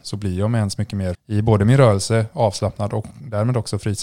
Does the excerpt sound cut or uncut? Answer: cut